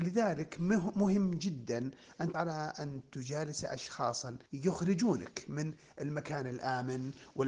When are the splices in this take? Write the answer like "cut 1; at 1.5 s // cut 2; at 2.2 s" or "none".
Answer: cut 1; at 2.3 s // cut 2; at 4.4 s